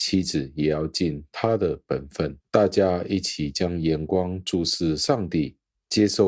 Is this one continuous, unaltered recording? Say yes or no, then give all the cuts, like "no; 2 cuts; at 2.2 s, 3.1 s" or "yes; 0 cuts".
no; 1 cut; at 2.4 s